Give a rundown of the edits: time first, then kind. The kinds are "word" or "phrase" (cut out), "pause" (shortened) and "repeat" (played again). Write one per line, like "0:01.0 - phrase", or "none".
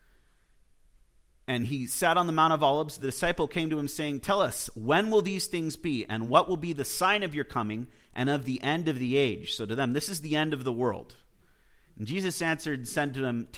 none